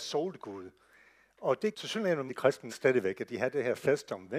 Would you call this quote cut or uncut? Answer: cut